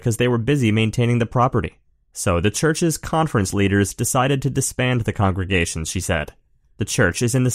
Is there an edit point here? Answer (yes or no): no